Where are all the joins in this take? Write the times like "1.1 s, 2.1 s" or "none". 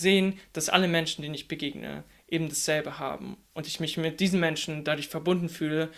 none